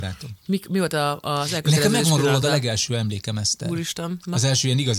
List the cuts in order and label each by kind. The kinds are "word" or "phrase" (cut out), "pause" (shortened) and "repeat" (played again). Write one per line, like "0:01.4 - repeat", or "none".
none